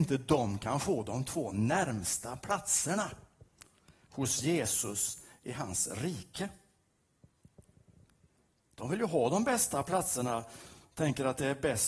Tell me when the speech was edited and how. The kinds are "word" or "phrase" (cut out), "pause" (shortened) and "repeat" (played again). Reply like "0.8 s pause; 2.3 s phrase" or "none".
none